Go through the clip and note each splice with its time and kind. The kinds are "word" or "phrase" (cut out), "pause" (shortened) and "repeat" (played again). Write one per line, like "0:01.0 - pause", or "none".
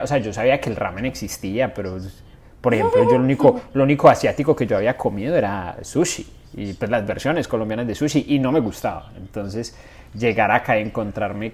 none